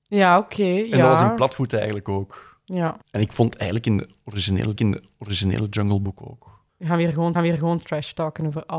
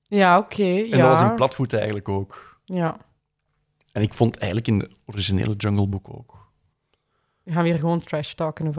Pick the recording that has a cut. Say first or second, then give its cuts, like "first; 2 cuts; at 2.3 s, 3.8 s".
first; 4 cuts; at 3.0 s, 4.8 s, 6.7 s, 7.3 s